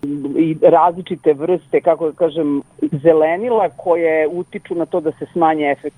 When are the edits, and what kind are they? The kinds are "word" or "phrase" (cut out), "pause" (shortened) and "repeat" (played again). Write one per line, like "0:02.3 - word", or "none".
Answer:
none